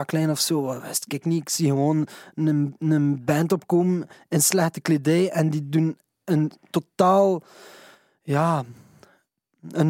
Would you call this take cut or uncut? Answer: uncut